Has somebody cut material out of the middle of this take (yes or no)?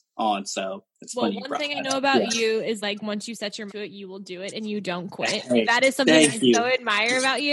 yes